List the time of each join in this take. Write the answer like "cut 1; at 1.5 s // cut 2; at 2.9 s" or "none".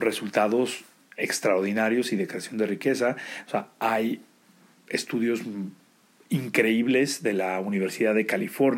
none